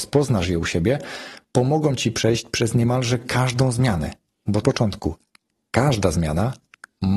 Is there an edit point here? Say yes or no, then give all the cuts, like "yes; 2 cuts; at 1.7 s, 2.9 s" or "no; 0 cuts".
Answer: yes; 1 cut; at 4.6 s